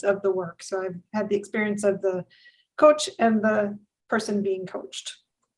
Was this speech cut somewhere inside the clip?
no; 0 cuts

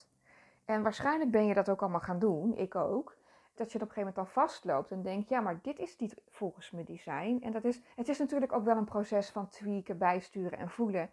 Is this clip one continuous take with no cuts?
no; 2 cuts; at 3.6 s, 7.9 s

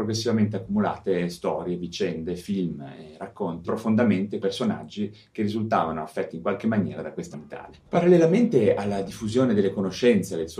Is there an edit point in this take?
yes; 4 cuts; at 3.6 s, 4.4 s, 7.3 s, 7.9 s

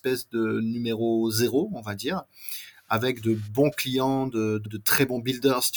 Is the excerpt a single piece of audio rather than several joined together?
no; 1 cut; at 4.7 s

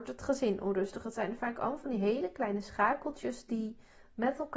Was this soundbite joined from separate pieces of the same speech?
no; 0 cuts

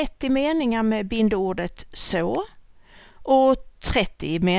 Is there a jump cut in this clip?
no; 0 cuts

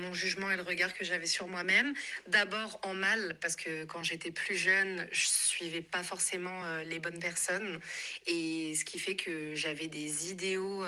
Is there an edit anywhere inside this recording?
no; 0 cuts

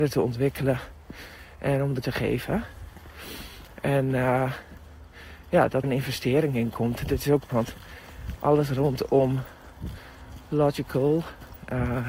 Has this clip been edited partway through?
yes; 3 cuts; at 2.0 s, 5.8 s, 7.5 s

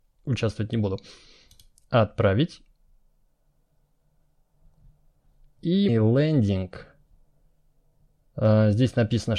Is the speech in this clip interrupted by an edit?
yes; 1 cut; at 5.9 s

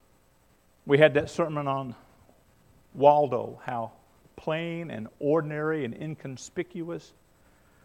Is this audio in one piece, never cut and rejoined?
yes; 0 cuts

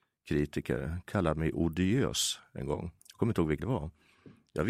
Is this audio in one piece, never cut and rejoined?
no; 2 cuts; at 3.0 s, 3.6 s

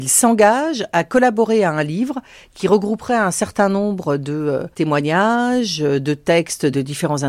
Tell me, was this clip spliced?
yes; 1 cut; at 4.7 s

